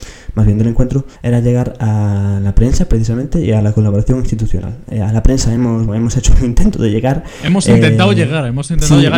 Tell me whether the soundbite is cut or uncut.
cut